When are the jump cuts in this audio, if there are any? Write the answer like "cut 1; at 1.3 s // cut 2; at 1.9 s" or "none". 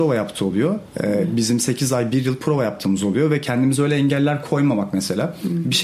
none